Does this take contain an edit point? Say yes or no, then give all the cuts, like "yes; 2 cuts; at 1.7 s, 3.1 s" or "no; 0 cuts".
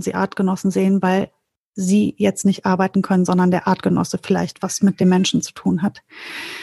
no; 0 cuts